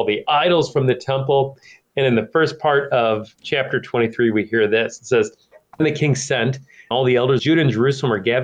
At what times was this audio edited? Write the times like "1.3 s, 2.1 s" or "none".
5.8 s, 6.9 s, 7.4 s